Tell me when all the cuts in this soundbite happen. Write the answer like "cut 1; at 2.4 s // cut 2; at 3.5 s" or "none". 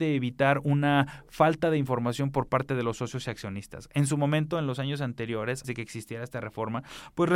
cut 1; at 5.6 s